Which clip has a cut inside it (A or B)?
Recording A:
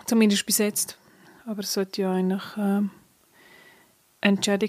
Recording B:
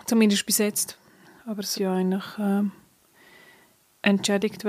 B